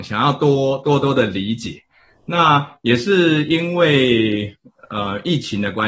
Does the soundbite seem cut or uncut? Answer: uncut